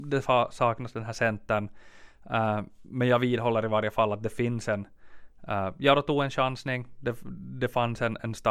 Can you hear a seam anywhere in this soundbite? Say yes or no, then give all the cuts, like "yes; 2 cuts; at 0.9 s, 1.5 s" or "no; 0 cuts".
no; 0 cuts